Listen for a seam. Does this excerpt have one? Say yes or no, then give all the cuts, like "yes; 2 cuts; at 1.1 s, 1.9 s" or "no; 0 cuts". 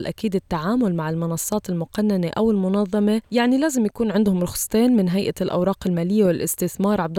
no; 0 cuts